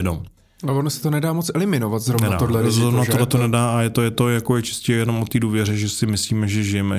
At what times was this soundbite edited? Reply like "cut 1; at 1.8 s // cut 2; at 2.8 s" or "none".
none